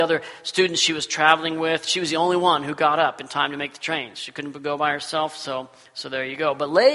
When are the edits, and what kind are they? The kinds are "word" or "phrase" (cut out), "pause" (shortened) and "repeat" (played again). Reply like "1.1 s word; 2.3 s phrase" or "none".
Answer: none

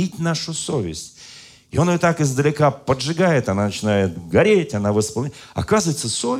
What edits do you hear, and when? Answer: none

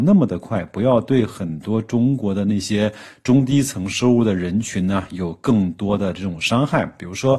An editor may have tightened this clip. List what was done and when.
none

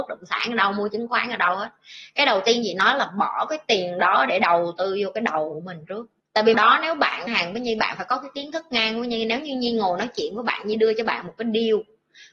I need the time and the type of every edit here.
6.5 s phrase; 7.3 s phrase

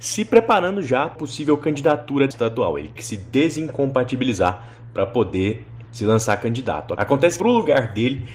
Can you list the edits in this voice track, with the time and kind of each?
1.2 s word; 2.3 s word; 3.0 s word; 5.8 s word; 7.4 s word

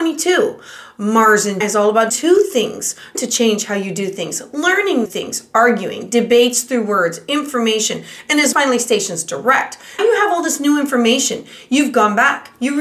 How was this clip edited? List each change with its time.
1.6 s word; 2.1 s word; 3.1 s word; 5.0 s word; 8.5 s word; 10.0 s word

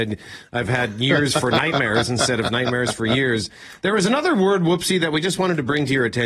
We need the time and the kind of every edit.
none

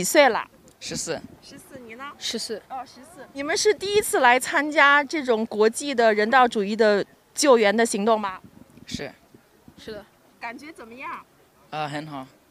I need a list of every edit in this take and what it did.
2.6 s pause; 3.3 s pause

